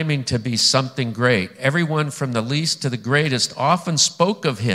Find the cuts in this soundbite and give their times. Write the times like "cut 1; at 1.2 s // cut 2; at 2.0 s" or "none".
none